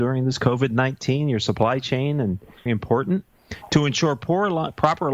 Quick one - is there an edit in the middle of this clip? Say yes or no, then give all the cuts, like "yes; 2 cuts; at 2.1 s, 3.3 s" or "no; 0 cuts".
yes; 1 cut; at 2.7 s